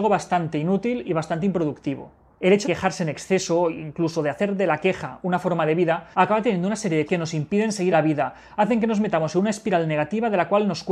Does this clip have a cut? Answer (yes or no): yes